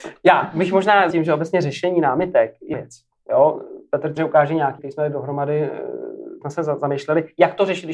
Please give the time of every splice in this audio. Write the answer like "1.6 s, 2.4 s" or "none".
1.1 s, 2.7 s, 4.2 s, 4.8 s, 6.4 s